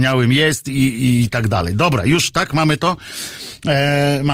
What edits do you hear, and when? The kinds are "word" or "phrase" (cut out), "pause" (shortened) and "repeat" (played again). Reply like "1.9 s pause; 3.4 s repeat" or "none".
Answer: none